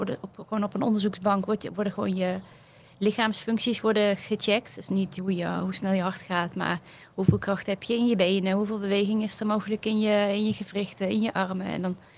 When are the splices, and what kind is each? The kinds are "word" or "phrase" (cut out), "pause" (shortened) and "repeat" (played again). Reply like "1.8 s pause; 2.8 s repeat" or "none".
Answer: none